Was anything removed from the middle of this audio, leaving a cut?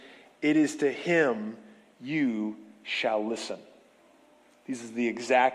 no; 0 cuts

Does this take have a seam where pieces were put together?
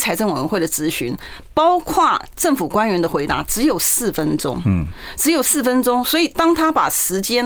no; 0 cuts

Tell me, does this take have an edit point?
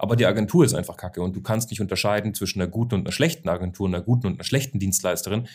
no; 0 cuts

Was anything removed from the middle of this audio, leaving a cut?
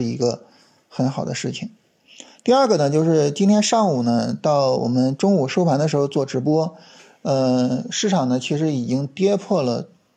no; 0 cuts

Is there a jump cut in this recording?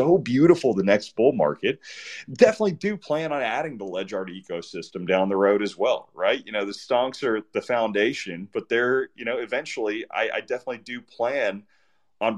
no; 0 cuts

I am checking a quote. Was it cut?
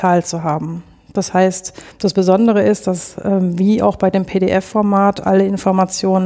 no; 0 cuts

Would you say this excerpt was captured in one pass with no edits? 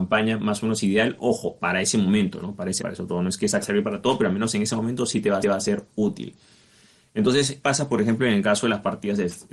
no; 4 cuts; at 2.8 s, 3.6 s, 5.4 s, 7.6 s

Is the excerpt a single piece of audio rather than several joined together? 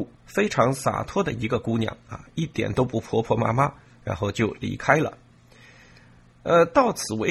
yes; 0 cuts

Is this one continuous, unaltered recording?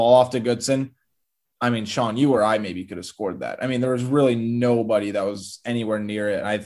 yes; 0 cuts

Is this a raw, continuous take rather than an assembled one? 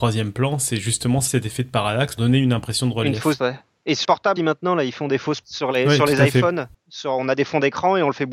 no; 6 cuts; at 1.3 s, 2.2 s, 3.4 s, 4.0 s, 4.4 s, 5.4 s

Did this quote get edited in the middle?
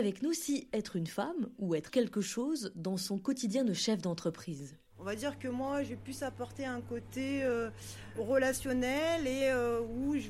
yes; 2 cuts; at 1.9 s, 4.9 s

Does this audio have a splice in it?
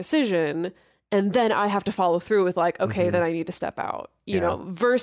no; 0 cuts

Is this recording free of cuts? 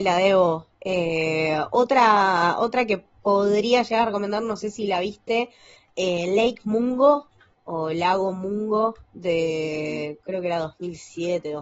yes; 0 cuts

